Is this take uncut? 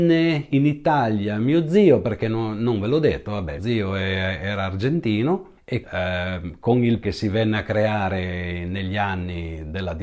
no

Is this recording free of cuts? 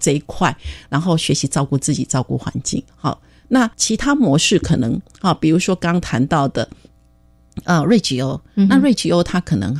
no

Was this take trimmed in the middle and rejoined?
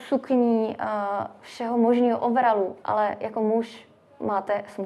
no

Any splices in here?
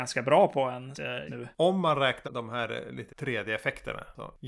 yes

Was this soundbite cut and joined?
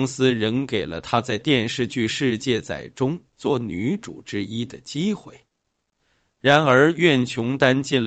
no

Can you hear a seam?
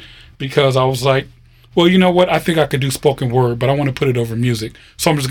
no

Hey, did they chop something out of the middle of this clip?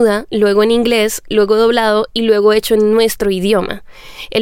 no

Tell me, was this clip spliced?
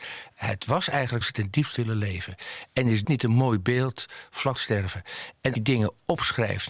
yes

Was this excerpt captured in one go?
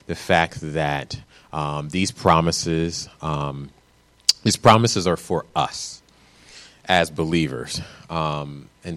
yes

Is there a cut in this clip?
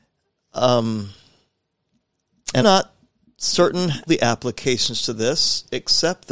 yes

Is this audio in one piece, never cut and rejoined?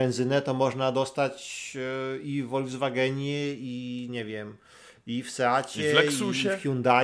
yes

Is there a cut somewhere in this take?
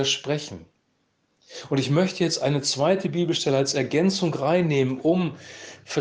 no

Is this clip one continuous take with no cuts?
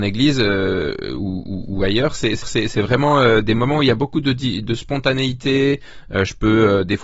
no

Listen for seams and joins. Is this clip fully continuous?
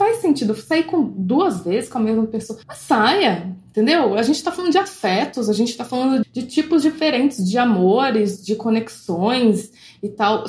no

